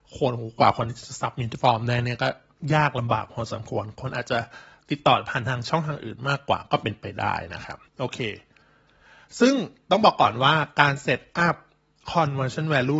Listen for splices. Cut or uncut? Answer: cut